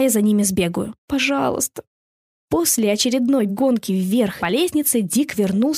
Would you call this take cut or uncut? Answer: cut